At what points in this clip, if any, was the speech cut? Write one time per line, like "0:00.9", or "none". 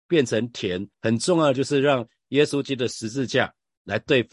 0:00.9